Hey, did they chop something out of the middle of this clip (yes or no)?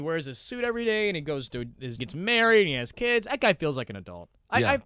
yes